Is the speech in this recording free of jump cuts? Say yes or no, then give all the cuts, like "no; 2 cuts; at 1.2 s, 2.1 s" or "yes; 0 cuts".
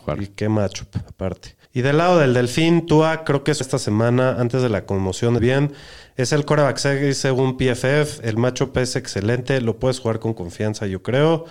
no; 3 cuts; at 1.6 s, 3.6 s, 5.4 s